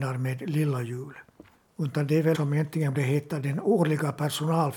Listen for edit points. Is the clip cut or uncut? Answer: cut